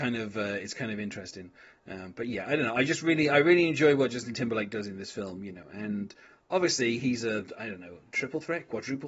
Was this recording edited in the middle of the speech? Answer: no; 0 cuts

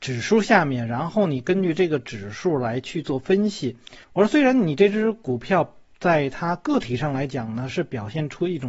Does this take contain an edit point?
yes; 1 cut; at 4.0 s

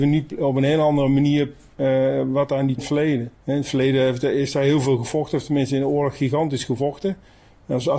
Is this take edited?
yes; 2 cuts; at 2.8 s, 3.3 s

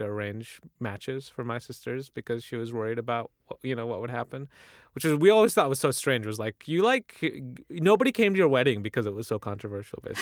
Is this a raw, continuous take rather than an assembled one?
yes; 0 cuts

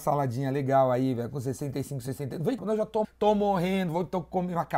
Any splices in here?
yes; 2 cuts; at 2.6 s, 3.0 s

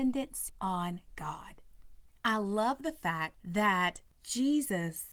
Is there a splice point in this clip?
no; 0 cuts

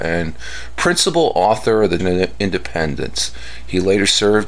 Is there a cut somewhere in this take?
yes; 1 cut; at 2.0 s

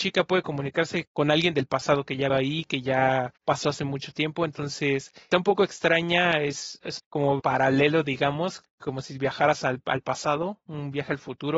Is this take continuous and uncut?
no; 6 cuts; at 1.1 s, 2.3 s, 3.4 s, 5.3 s, 7.0 s, 7.4 s

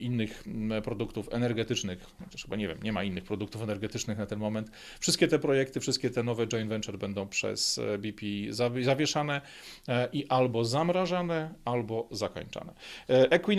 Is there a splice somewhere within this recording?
no; 0 cuts

